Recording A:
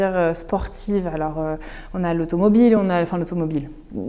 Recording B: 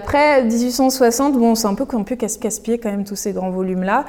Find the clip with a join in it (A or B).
B